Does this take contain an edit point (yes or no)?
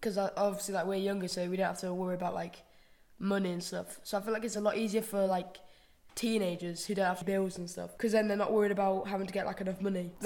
no